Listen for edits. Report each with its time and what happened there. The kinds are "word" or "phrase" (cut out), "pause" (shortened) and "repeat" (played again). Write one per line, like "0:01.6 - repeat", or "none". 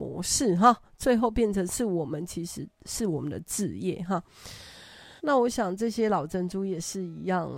0:02.7 - pause
0:05.2 - pause